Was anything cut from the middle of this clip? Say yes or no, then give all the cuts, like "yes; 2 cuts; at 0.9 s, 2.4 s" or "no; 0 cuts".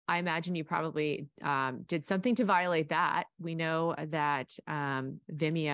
no; 0 cuts